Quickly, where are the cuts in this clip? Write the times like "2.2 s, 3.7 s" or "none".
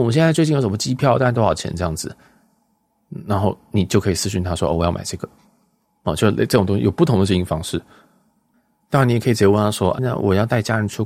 10.0 s

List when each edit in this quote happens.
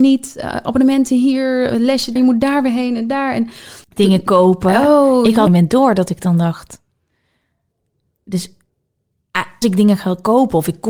2.2 s, 3.8 s, 5.5 s, 9.6 s

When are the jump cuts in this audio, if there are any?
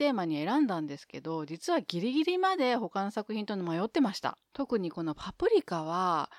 4.5 s

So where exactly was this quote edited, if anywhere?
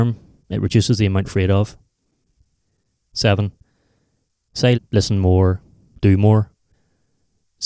1.2 s, 4.7 s

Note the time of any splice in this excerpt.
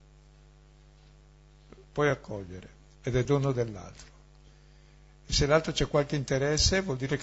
none

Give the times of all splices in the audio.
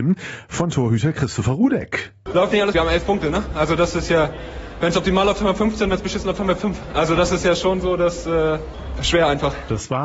2.7 s

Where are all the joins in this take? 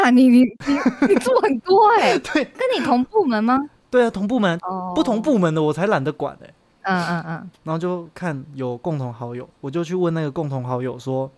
none

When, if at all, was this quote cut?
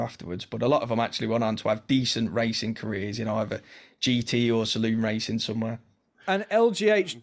none

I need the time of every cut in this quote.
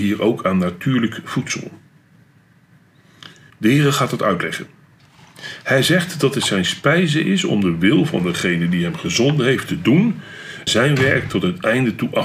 3.5 s, 10.7 s

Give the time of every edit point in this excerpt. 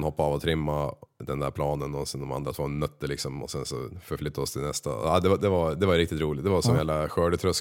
none

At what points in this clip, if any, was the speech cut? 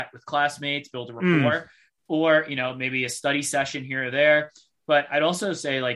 none

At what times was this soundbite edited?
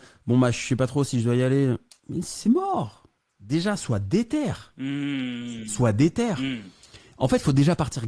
none

